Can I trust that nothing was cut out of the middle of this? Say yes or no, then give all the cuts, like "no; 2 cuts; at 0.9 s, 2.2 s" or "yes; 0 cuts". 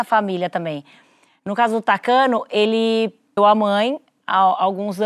no; 1 cut; at 3.4 s